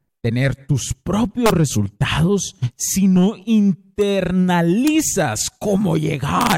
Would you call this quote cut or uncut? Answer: uncut